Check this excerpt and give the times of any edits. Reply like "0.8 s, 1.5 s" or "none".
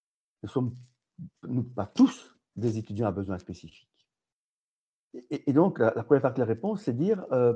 none